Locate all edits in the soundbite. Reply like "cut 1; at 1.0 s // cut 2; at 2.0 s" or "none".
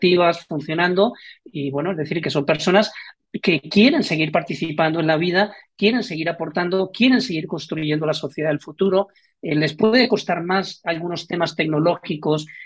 none